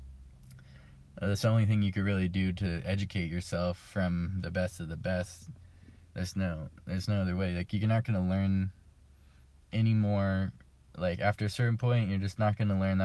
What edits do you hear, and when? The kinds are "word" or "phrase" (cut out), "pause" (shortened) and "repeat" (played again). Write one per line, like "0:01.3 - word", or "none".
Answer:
none